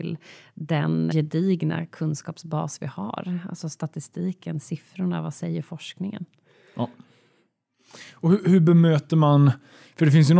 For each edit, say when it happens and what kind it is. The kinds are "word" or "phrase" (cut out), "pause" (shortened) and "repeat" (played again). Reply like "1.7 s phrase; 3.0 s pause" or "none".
1.1 s word

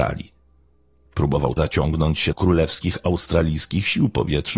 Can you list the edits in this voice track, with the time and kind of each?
1.6 s phrase; 2.3 s word

